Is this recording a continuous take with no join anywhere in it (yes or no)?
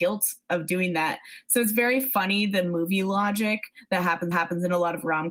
no